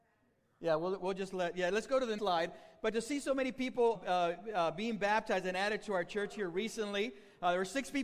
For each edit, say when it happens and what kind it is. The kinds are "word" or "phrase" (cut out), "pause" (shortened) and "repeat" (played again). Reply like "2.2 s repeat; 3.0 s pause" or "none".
2.2 s word; 3.9 s word